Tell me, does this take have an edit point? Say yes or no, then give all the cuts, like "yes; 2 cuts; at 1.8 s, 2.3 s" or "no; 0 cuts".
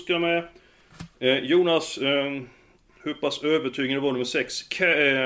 no; 0 cuts